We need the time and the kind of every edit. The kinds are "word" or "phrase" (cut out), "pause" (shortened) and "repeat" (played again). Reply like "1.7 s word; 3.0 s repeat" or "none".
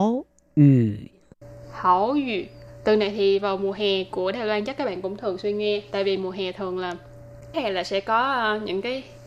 7.5 s word